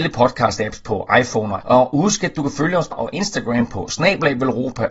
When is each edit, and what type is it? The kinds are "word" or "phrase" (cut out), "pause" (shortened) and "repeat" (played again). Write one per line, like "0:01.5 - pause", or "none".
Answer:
0:01.6 - word
0:02.9 - word